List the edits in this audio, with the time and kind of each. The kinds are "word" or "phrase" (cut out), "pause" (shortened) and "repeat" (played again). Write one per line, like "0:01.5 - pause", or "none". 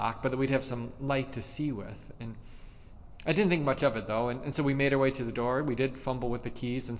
none

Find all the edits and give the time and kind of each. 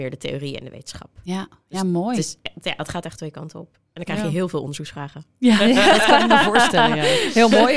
none

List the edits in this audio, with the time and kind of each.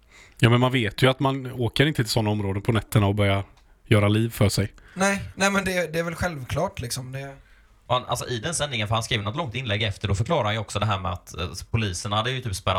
none

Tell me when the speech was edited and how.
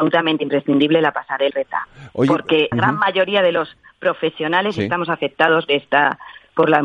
0:01.5 - word
0:02.7 - word
0:05.7 - word

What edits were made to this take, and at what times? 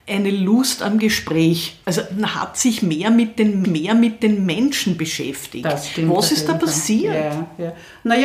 0:01.8 - pause
0:03.6 - repeat

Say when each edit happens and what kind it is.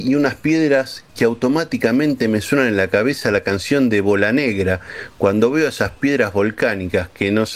none

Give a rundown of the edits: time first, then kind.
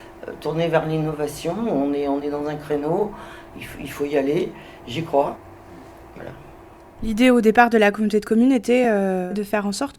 none

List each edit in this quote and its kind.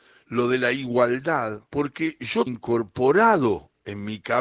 0:01.7 - pause
0:02.5 - word

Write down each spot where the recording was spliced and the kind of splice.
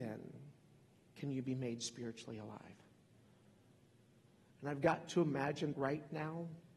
0:05.7 - word

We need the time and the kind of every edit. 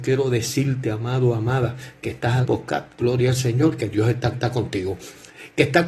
0:02.4 - phrase
0:04.3 - repeat

